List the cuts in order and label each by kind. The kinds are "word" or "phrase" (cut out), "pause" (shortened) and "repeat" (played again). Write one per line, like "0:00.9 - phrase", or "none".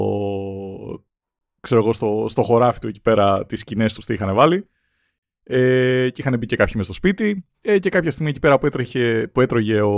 none